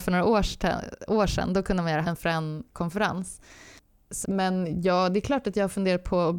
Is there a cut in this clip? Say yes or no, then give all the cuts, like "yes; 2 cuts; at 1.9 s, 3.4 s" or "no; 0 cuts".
yes; 2 cuts; at 2.0 s, 4.2 s